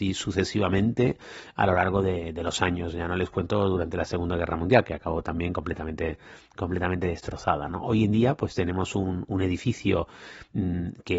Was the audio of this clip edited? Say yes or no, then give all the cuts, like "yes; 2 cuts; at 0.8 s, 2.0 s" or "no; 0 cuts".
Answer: no; 0 cuts